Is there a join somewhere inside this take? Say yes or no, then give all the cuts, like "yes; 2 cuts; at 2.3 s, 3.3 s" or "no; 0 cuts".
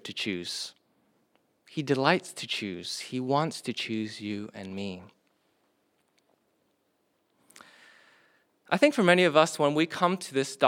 no; 0 cuts